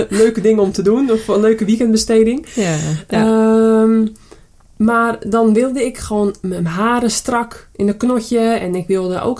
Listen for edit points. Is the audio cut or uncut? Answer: uncut